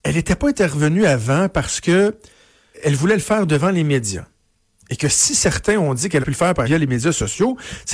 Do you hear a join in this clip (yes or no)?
yes